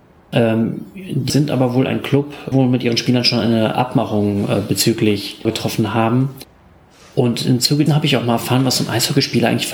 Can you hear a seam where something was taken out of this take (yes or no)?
yes